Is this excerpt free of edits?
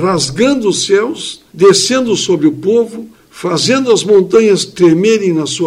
no; 2 cuts; at 1.5 s, 3.1 s

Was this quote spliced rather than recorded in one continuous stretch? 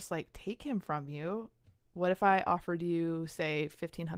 no; 0 cuts

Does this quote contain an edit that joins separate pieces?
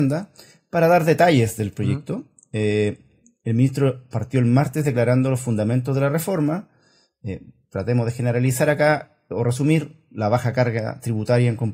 no; 0 cuts

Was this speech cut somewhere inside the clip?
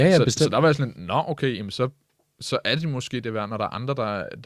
no; 0 cuts

